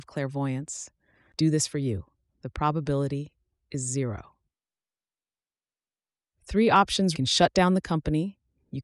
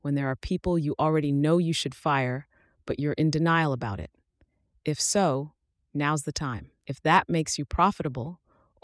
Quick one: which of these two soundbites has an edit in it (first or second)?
first